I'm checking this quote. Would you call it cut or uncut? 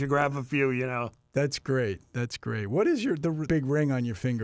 cut